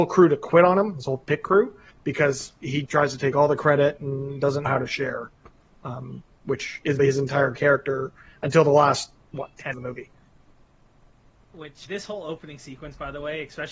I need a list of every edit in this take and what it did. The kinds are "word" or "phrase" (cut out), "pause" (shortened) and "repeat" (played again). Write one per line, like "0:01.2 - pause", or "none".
0:02.9 - word
0:04.7 - word
0:07.0 - word
0:09.7 - word
0:11.9 - word